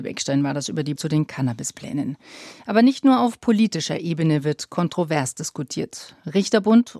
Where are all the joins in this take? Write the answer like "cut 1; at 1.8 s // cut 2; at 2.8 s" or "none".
cut 1; at 1.0 s